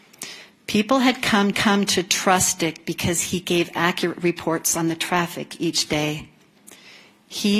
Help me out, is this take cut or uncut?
cut